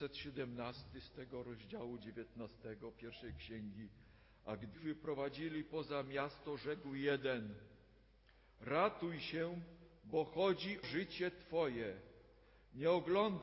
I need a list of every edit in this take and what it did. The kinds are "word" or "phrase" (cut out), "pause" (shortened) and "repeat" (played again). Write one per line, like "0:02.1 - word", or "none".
0:04.7 - word
0:10.8 - word